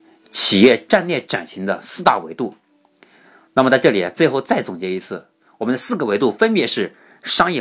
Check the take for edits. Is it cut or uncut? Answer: uncut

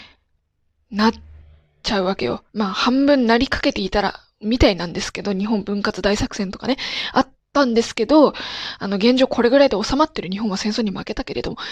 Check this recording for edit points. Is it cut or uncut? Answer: cut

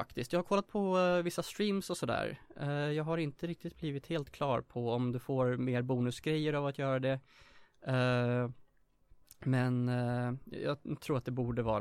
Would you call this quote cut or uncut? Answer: uncut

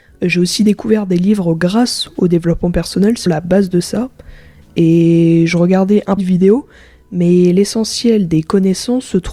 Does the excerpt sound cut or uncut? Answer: cut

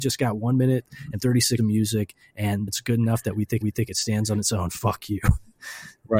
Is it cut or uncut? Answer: cut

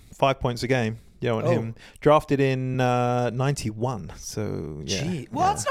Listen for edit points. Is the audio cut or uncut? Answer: uncut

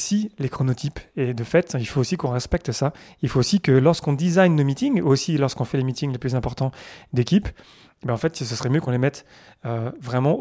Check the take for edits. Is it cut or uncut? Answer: uncut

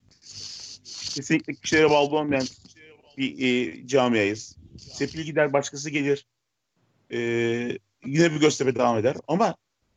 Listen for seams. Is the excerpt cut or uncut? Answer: uncut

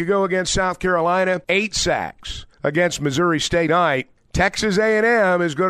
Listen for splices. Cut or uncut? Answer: cut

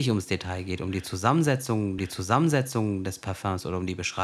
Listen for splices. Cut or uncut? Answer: cut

